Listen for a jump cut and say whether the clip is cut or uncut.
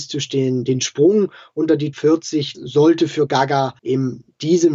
cut